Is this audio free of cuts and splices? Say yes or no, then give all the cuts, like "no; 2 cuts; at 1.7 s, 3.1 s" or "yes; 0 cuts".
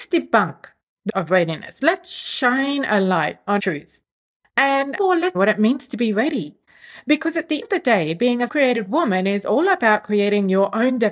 no; 6 cuts; at 1.1 s, 3.6 s, 5.0 s, 5.3 s, 7.6 s, 8.5 s